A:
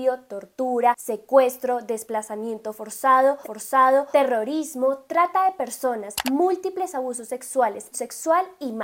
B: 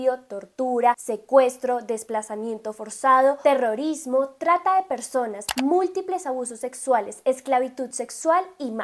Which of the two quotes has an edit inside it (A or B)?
A